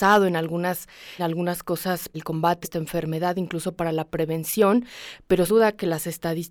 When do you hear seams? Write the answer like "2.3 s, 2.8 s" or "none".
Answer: 1.2 s, 2.1 s, 2.6 s, 5.5 s

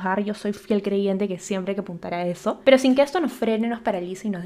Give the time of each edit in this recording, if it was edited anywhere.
2.6 s

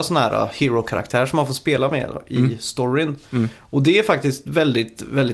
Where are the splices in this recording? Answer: none

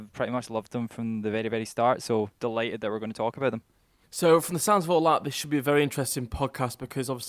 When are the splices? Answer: none

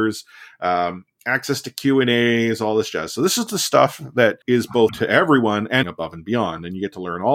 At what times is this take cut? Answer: 4.4 s, 4.9 s, 5.8 s

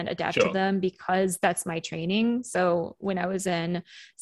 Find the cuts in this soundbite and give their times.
3.0 s

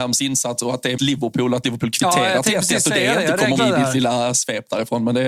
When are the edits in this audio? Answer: 1.0 s, 3.6 s

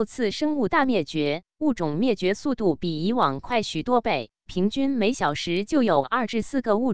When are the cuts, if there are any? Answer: none

